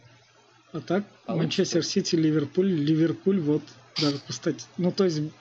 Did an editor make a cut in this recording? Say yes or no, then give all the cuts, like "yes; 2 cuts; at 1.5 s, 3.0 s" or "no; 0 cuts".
no; 0 cuts